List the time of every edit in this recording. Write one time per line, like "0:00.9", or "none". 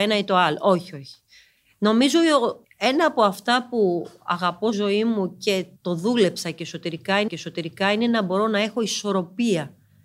0:02.6
0:04.7
0:05.8
0:07.3